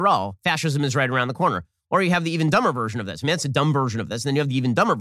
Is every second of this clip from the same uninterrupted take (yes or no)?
yes